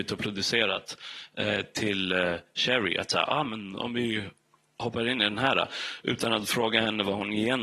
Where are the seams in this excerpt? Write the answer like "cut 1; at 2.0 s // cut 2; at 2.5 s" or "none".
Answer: none